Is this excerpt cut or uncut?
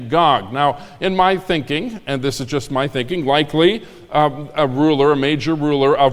uncut